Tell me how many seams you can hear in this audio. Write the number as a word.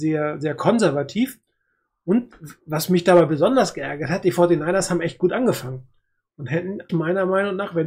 one